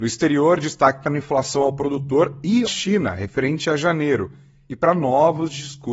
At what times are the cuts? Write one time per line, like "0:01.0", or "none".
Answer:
0:02.7